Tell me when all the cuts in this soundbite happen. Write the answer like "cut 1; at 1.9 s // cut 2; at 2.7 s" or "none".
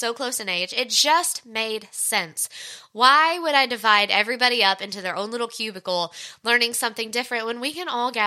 none

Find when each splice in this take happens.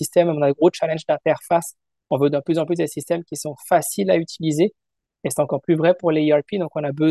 none

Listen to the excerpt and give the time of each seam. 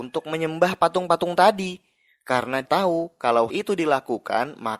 cut 1; at 2.6 s // cut 2; at 3.5 s

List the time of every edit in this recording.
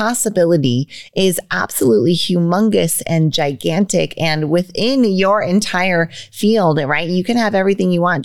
none

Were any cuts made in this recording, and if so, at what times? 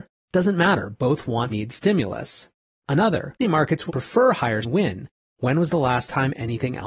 cut 1; at 1.5 s // cut 2; at 3.4 s // cut 3; at 3.9 s // cut 4; at 4.6 s

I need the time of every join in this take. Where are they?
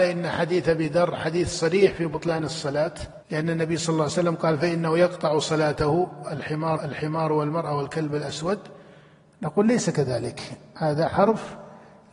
cut 1; at 3.2 s // cut 2; at 6.8 s

